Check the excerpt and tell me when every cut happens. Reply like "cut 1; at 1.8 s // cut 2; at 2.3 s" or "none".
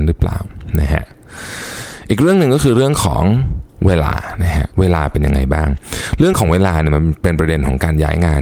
cut 1; at 4.7 s